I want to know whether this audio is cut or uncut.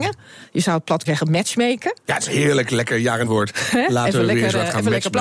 cut